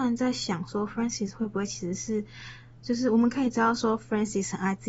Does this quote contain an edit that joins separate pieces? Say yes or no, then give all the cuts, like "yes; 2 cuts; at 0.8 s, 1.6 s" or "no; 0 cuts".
yes; 1 cut; at 2.7 s